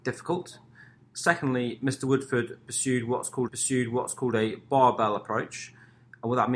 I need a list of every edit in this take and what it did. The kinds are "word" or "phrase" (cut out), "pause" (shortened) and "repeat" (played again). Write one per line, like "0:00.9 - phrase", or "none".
0:03.5 - repeat